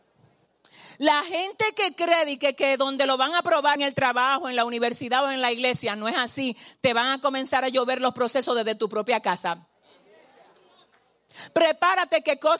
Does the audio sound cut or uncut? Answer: cut